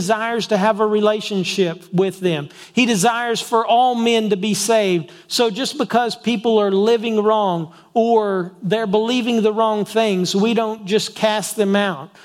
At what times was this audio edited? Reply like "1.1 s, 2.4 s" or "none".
none